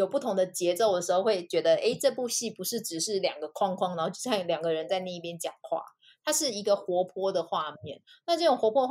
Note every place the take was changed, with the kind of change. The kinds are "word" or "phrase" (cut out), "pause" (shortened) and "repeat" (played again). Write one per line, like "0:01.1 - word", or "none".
none